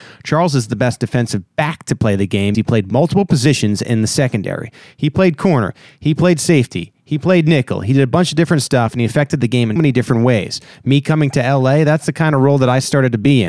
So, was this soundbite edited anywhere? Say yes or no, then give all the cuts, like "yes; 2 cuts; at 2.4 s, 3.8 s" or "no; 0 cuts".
yes; 2 cuts; at 2.5 s, 9.8 s